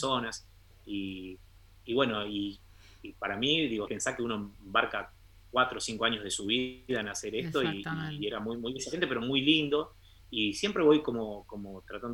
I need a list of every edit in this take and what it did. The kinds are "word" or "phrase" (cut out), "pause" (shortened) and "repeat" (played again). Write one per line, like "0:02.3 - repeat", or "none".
0:03.9 - phrase